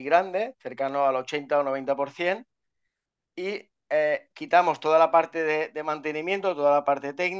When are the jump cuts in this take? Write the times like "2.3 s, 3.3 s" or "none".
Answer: none